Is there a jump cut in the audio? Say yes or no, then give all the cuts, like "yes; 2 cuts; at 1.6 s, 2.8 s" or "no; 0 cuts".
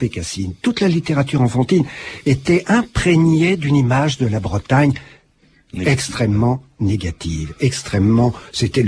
no; 0 cuts